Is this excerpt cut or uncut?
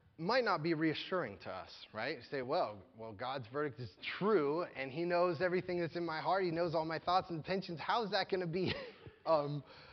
uncut